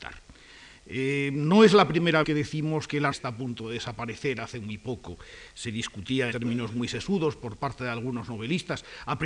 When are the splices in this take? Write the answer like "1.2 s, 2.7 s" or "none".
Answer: 2.2 s, 3.1 s, 6.3 s